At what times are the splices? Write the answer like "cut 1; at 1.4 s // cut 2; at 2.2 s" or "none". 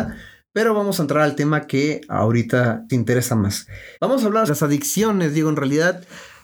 cut 1; at 2.9 s // cut 2; at 3.9 s // cut 3; at 4.5 s